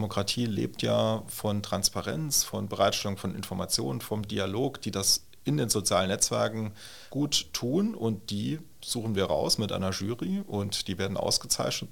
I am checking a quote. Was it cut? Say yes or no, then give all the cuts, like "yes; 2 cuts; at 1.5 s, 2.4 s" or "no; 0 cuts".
yes; 1 cut; at 7.1 s